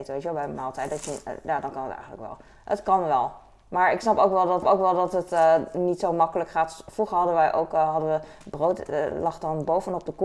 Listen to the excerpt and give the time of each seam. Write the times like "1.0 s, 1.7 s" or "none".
4.6 s